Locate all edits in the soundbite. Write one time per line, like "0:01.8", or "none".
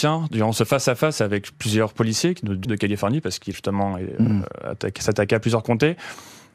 0:02.6
0:03.5